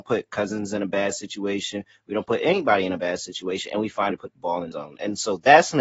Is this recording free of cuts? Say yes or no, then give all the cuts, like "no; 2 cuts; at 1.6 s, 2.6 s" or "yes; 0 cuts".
no; 2 cuts; at 4.1 s, 4.7 s